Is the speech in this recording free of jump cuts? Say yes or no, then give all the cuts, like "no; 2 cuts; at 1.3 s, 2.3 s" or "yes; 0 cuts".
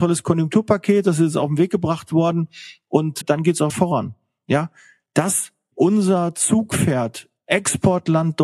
no; 3 cuts; at 3.2 s, 3.7 s, 5.7 s